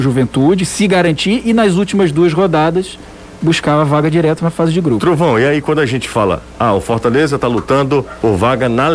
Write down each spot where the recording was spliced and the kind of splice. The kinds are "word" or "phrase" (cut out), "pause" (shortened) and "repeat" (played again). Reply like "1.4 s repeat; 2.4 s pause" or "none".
none